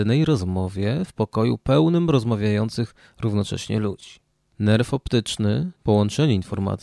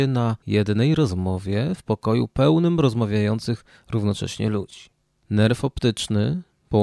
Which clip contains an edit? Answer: first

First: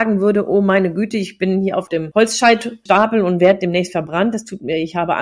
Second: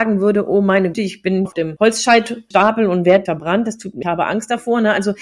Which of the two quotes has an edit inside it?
second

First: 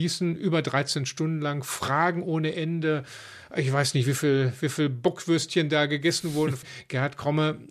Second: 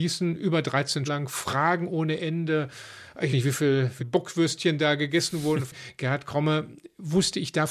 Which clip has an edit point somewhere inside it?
second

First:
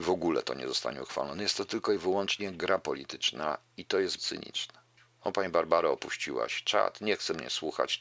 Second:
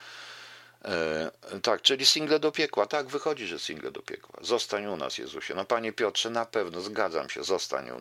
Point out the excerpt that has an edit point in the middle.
first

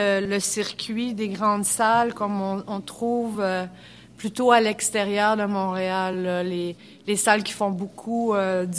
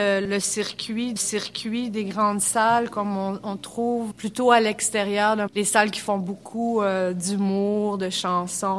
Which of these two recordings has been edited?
second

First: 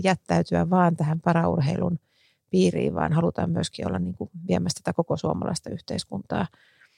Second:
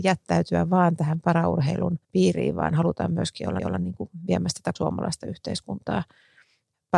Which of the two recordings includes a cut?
second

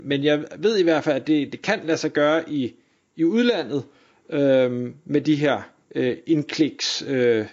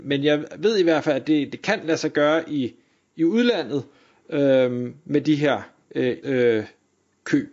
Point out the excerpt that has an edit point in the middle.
second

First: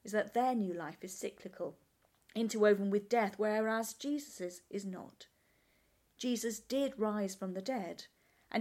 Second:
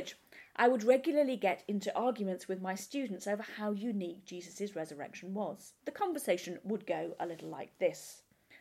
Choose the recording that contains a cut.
second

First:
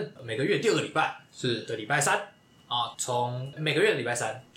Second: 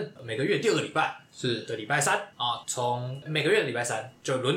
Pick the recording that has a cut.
second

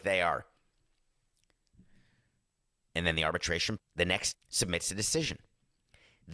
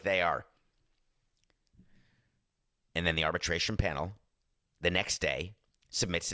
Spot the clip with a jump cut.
first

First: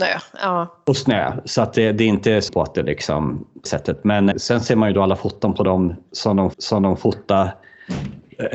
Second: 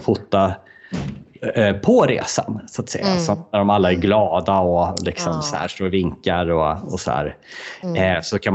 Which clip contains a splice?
first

